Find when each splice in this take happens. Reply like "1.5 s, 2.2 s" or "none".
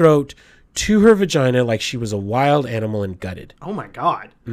none